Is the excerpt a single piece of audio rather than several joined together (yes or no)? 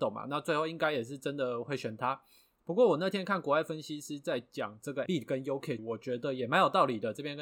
no